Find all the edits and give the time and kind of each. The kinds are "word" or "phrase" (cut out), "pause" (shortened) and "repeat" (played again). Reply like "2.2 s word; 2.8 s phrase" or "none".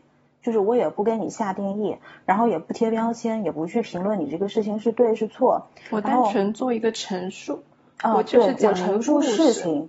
none